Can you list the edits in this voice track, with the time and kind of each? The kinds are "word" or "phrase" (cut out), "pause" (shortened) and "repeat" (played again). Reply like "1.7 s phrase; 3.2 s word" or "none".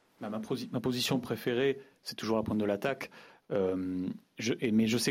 none

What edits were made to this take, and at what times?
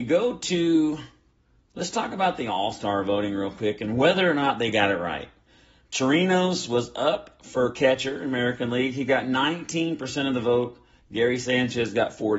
none

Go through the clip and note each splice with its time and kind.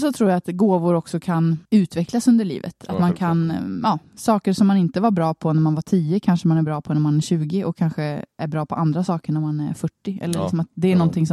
1.6 s pause

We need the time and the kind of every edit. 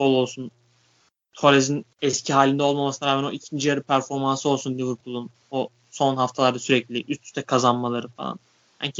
1.9 s pause

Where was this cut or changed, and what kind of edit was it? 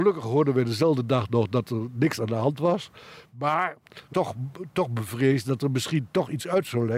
4.1 s word

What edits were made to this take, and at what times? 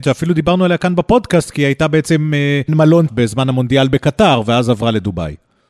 2.7 s word; 3.1 s word

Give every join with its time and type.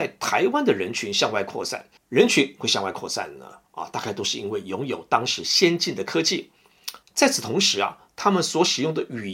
2.0 s pause; 7.0 s pause

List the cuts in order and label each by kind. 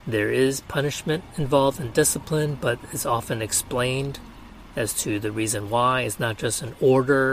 none

